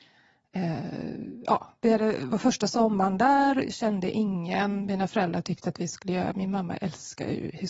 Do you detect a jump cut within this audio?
no; 0 cuts

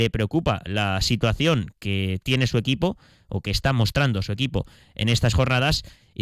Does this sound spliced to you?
yes; 1 cut; at 5.3 s

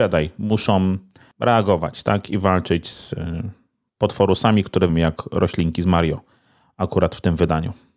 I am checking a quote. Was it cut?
yes; 1 cut; at 4.9 s

